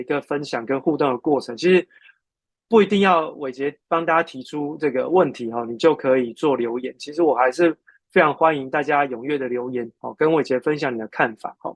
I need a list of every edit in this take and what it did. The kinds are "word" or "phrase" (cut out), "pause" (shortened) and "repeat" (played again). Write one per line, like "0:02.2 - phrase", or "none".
none